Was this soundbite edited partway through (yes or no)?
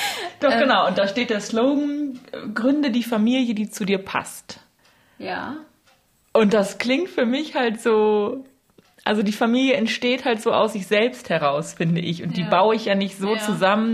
no